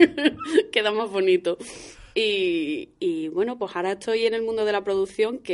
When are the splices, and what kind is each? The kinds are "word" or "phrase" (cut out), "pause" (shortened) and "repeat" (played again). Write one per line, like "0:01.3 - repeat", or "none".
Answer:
0:02.1 - pause